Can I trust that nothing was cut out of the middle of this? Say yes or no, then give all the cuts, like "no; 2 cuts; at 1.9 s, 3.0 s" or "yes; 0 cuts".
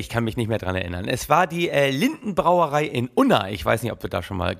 yes; 0 cuts